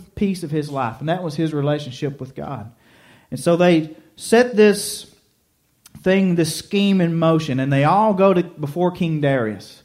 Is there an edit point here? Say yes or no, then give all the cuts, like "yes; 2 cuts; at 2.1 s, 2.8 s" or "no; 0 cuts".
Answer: no; 0 cuts